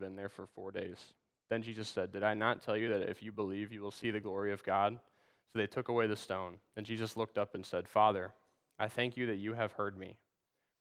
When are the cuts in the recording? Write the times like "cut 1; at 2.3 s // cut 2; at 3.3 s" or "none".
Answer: none